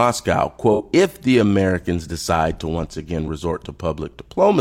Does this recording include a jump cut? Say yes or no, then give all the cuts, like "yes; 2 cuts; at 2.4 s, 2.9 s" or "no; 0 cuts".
no; 0 cuts